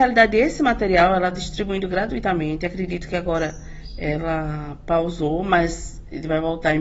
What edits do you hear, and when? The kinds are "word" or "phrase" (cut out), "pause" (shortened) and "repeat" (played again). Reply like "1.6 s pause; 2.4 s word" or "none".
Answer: 1.3 s word